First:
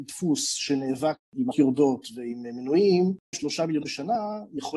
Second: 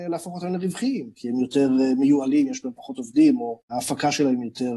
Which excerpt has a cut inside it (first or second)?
first